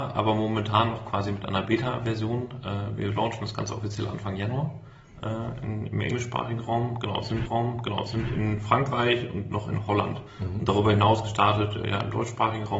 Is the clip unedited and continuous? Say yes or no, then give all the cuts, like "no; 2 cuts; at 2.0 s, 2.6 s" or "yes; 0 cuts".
no; 1 cut; at 7.4 s